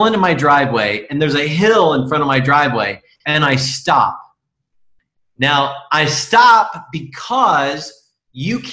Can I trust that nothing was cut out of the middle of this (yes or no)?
yes